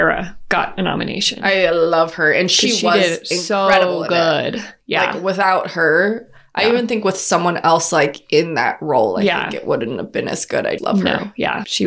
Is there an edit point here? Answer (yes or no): yes